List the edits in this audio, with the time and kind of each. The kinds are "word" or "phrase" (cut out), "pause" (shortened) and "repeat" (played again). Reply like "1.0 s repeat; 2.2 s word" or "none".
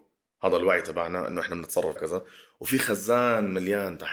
2.0 s word